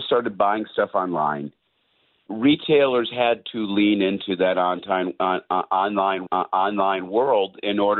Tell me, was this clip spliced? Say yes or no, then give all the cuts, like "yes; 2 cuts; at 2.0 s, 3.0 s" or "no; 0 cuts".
yes; 2 cuts; at 2.3 s, 6.3 s